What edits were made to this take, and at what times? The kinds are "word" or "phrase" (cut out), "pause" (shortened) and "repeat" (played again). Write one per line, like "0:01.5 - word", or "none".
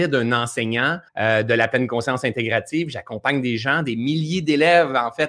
0:01.1 - pause